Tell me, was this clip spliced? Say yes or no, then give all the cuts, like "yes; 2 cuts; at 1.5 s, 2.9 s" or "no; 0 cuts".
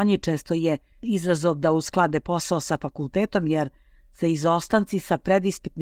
no; 0 cuts